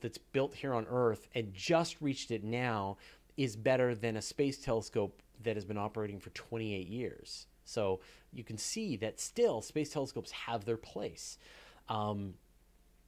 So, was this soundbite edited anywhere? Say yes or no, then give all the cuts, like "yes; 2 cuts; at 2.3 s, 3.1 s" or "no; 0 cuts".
no; 0 cuts